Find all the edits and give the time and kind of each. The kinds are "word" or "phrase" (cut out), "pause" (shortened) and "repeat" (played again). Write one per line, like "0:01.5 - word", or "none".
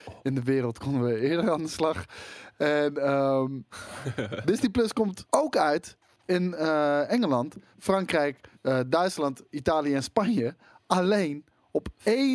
0:05.3 - pause
0:08.6 - pause